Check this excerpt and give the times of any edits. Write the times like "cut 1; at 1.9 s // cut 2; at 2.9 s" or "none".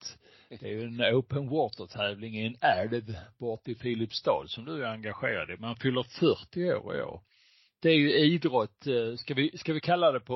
none